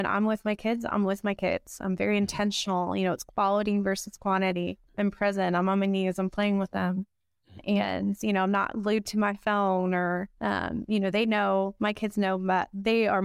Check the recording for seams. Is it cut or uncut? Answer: cut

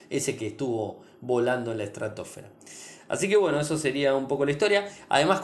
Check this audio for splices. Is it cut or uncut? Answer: uncut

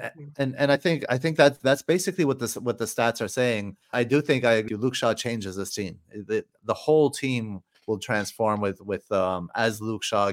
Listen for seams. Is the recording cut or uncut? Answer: cut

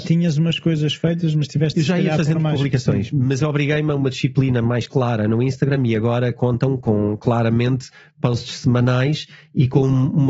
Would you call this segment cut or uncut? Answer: uncut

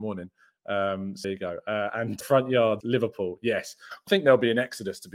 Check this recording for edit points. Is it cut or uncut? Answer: cut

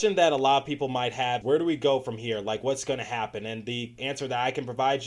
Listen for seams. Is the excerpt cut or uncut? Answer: cut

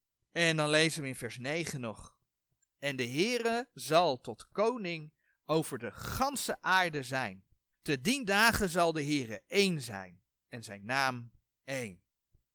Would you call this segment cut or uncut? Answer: uncut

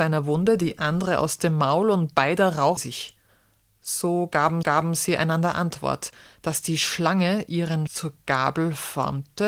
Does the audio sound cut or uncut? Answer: cut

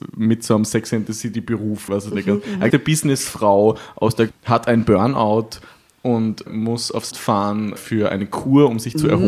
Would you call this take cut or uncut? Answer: cut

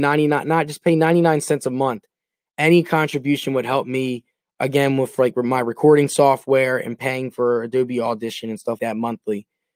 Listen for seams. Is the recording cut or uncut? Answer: cut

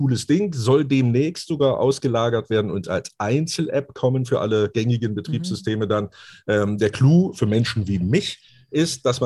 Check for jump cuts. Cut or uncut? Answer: uncut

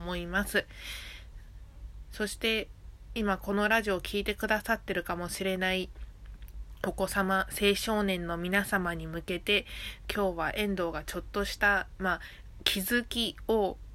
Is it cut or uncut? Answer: uncut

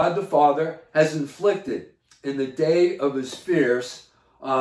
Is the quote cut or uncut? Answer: uncut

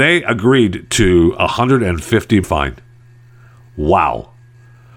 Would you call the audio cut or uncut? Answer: cut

